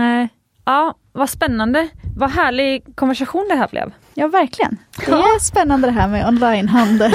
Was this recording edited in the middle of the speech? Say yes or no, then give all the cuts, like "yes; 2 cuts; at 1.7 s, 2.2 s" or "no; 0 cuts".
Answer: yes; 1 cut; at 4.0 s